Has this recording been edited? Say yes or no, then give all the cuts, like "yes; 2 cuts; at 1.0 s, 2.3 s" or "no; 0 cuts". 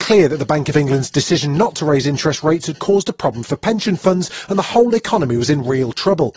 no; 0 cuts